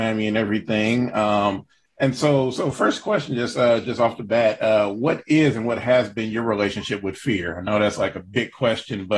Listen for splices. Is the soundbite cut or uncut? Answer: uncut